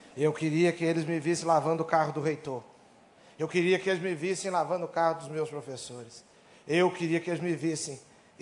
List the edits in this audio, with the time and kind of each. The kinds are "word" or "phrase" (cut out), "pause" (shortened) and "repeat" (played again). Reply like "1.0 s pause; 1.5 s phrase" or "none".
none